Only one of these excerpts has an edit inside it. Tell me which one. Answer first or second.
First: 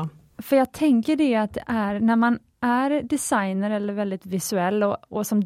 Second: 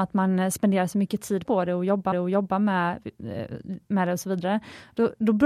second